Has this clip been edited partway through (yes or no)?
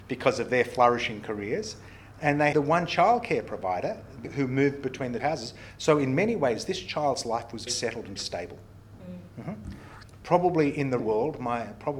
yes